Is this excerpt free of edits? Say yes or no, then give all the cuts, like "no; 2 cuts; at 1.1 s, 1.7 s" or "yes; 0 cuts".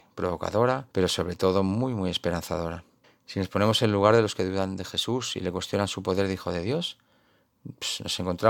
no; 2 cuts; at 0.9 s, 3.0 s